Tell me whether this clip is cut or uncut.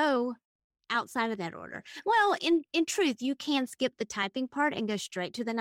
uncut